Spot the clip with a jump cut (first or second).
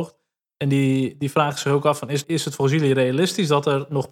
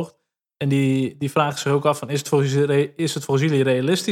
first